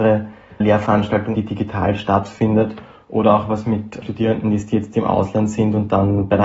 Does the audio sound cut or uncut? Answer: cut